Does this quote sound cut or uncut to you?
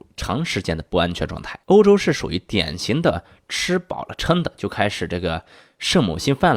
cut